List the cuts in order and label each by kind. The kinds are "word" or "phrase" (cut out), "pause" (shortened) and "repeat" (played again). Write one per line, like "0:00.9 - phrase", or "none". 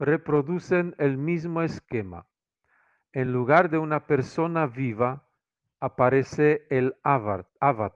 none